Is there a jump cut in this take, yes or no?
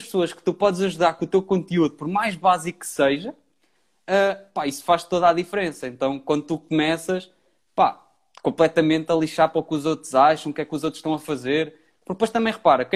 no